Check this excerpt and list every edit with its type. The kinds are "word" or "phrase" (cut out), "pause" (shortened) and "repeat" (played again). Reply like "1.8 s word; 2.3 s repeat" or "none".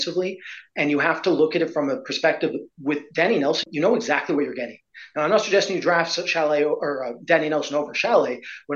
3.6 s word